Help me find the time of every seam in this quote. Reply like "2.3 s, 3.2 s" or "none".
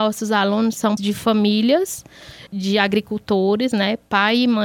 1.0 s, 2.5 s